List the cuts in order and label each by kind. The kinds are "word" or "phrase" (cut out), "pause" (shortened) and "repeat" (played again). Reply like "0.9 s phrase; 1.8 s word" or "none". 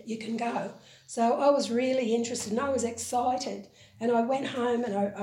none